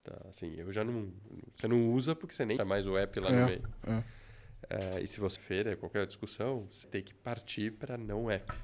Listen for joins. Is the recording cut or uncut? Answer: cut